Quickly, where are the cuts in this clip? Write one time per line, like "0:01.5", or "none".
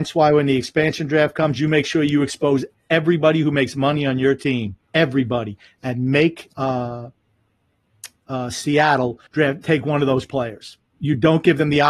0:04.8
0:06.5
0:09.3